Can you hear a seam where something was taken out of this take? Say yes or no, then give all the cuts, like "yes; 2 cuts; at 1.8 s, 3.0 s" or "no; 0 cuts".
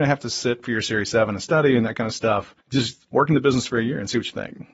yes; 1 cut; at 2.6 s